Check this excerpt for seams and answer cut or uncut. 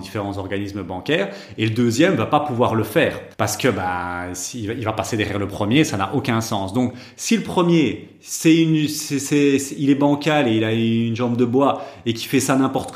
cut